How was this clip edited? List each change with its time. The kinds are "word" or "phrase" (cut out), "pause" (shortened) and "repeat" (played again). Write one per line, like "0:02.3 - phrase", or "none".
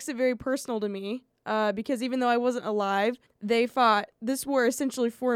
0:03.3 - pause
0:04.1 - pause